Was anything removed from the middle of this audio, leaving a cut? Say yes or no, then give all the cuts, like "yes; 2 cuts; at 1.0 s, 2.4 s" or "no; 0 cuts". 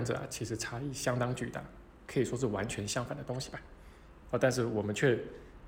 no; 0 cuts